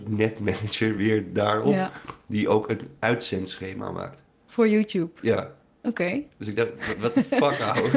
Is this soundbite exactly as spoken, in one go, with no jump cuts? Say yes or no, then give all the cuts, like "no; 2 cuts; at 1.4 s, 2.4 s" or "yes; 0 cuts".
yes; 0 cuts